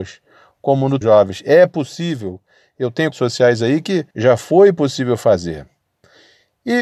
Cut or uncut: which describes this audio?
cut